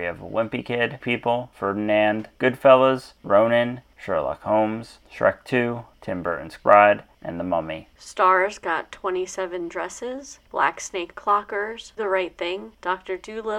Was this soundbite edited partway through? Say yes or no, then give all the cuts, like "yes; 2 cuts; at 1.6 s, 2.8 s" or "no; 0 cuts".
yes; 4 cuts; at 1.0 s, 6.6 s, 11.1 s, 12.0 s